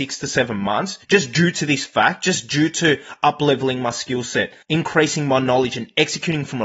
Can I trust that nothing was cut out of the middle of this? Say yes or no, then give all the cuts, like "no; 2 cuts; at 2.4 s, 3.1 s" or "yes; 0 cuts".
no; 2 cuts; at 1.0 s, 4.6 s